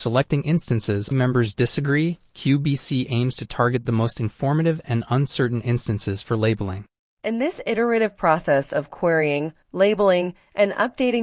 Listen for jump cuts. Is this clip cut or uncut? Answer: cut